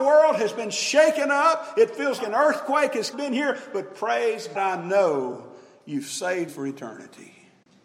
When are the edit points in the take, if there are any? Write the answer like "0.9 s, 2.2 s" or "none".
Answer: 2.2 s, 3.1 s, 4.5 s, 6.5 s